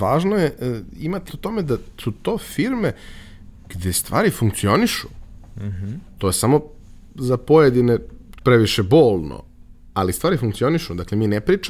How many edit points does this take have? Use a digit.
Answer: 3